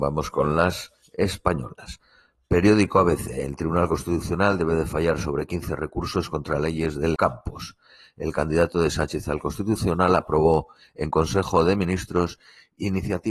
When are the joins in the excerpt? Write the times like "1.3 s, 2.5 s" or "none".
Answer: 7.2 s